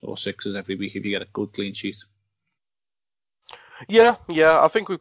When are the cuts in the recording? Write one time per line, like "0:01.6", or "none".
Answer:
none